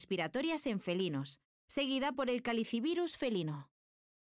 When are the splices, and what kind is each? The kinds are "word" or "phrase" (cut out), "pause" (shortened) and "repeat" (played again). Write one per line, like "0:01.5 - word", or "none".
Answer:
0:02.1 - phrase